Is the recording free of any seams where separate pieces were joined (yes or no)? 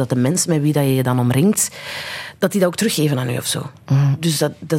yes